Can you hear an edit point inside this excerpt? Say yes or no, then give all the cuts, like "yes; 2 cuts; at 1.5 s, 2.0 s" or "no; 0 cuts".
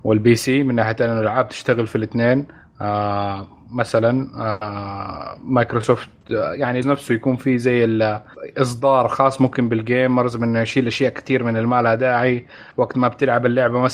yes; 1 cut; at 6.8 s